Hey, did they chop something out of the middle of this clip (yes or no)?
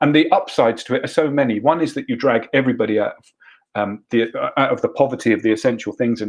no